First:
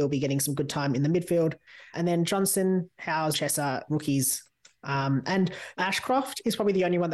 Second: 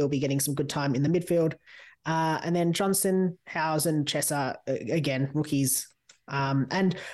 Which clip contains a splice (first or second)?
first